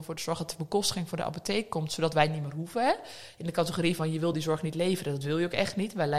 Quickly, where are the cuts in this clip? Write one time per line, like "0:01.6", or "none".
none